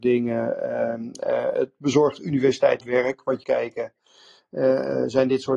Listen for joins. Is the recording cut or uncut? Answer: cut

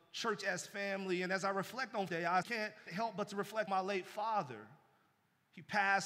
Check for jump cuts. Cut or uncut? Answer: cut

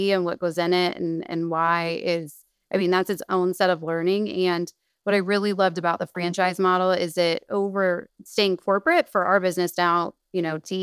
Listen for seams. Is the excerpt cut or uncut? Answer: uncut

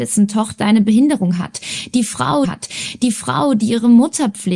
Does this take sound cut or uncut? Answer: cut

